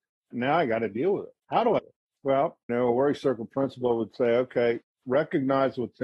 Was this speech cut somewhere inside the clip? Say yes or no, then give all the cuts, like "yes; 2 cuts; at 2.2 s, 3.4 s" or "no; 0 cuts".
yes; 3 cuts; at 1.4 s, 1.8 s, 2.7 s